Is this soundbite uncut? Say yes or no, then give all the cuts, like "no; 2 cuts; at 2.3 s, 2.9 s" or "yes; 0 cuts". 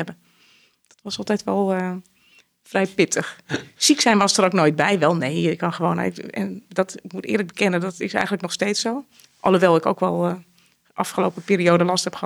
yes; 0 cuts